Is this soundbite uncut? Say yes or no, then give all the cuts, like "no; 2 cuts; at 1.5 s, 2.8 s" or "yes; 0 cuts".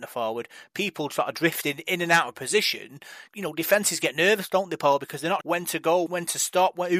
no; 3 cuts; at 3.3 s, 5.4 s, 6.1 s